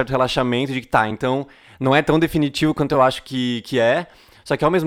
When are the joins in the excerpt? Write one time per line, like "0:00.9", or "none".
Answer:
none